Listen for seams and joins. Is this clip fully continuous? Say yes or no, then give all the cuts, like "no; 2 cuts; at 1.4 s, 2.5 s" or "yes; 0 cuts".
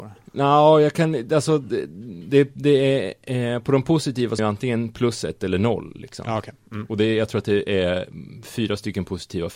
no; 1 cut; at 4.4 s